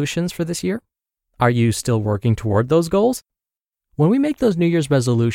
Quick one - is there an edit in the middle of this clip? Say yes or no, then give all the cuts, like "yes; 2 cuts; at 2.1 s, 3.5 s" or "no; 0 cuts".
no; 0 cuts